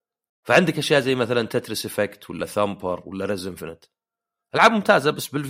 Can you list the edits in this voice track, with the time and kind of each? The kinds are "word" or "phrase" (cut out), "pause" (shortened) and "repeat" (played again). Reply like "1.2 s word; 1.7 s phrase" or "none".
none